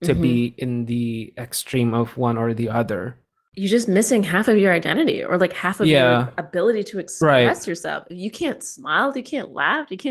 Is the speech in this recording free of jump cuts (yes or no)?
yes